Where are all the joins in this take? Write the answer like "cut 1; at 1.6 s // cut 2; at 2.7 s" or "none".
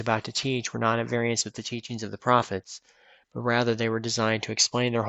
none